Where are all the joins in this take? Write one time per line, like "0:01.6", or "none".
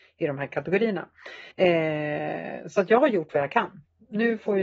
0:01.5